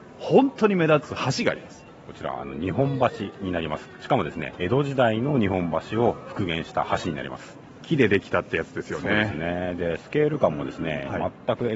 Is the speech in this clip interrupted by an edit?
yes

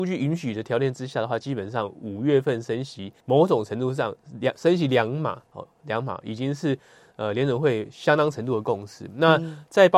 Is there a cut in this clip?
yes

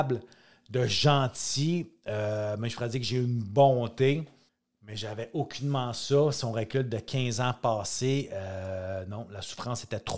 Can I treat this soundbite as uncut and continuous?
no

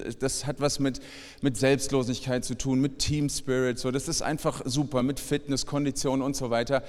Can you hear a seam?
no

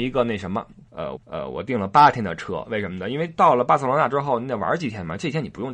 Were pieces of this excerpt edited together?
yes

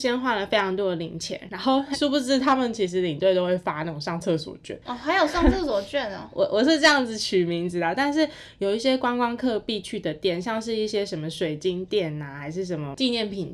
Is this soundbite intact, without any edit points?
no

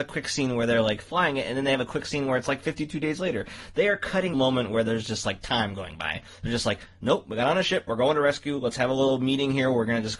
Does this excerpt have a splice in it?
yes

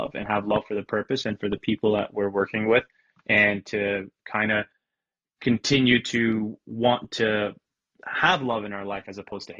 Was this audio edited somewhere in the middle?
no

